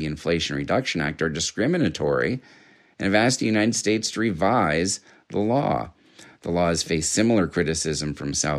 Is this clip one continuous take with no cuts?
yes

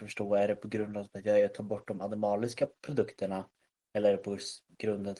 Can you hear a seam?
no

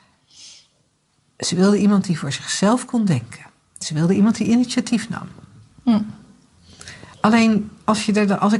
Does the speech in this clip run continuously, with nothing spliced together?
no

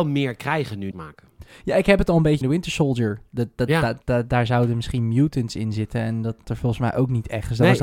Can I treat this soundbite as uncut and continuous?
no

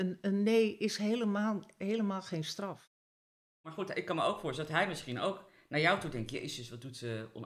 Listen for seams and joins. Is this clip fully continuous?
yes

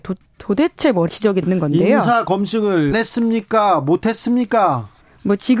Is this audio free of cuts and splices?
no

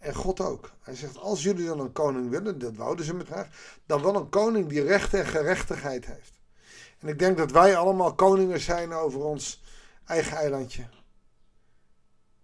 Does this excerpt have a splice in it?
yes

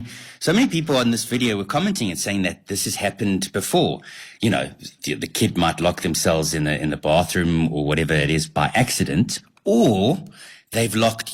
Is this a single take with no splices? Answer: yes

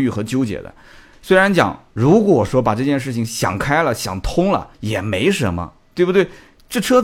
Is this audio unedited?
no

